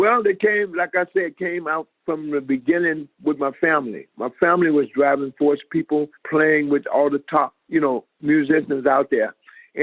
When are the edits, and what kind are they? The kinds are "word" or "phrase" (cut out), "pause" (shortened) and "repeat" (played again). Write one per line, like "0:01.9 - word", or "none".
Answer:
0:02.0 - pause
0:06.2 - pause
0:07.6 - pause